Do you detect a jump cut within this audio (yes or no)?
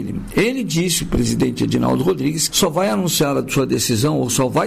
yes